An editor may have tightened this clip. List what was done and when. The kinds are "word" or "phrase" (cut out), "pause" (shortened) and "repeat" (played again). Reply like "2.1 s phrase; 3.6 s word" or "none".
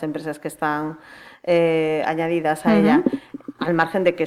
none